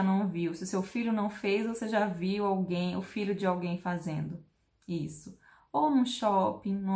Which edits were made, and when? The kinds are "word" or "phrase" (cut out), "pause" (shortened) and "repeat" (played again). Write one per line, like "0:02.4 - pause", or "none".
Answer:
none

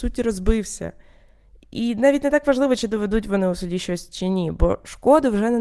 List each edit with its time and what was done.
none

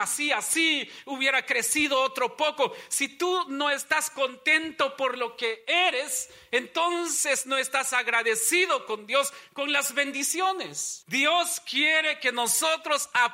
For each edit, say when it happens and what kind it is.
0:11.0 - pause

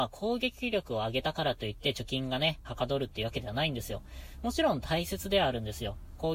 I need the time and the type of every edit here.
0:02.6 - phrase

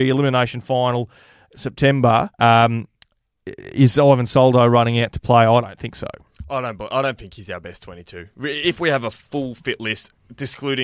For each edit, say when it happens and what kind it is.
0:02.3 - pause

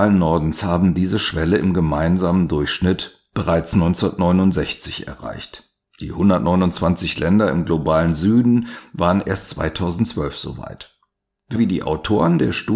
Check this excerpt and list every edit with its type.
0:11.6 - word

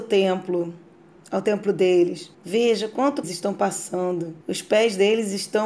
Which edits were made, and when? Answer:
0:02.3 - pause
0:03.2 - phrase
0:04.4 - pause

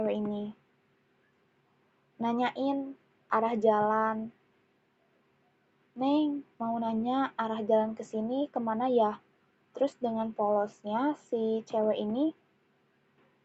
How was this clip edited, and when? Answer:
0:06.5 - pause

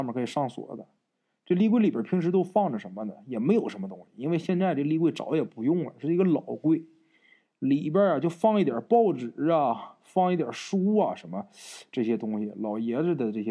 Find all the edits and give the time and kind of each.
none

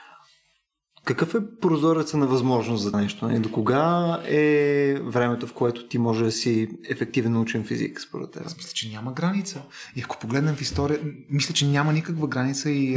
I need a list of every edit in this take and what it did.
0:02.9 - word

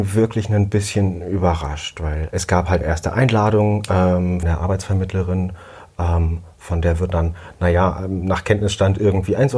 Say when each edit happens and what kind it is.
0:02.3 - word
0:02.8 - word
0:04.4 - word
0:07.1 - word

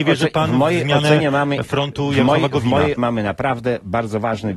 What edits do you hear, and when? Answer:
0:03.0 - word

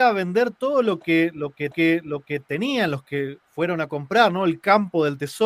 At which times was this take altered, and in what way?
0:01.7 - repeat
0:03.4 - pause

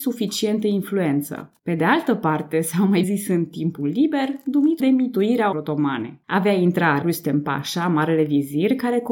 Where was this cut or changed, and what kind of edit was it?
0:01.6 - pause
0:03.0 - word
0:04.8 - phrase
0:05.5 - word
0:06.2 - pause
0:07.0 - word

